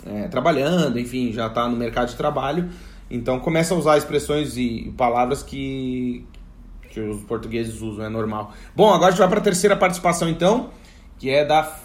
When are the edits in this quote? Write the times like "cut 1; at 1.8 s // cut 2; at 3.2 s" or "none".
none